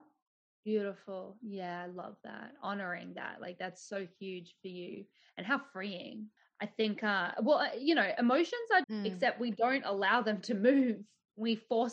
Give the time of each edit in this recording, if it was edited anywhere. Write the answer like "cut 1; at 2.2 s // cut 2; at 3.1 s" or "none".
cut 1; at 6.4 s // cut 2; at 8.8 s